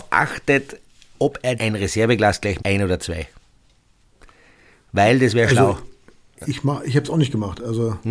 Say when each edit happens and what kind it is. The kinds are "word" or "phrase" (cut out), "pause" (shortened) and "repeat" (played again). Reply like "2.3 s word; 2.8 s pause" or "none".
1.6 s word; 2.6 s word; 6.3 s word